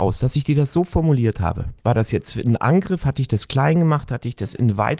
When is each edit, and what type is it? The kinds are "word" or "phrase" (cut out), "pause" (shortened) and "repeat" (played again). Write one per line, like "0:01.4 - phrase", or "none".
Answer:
none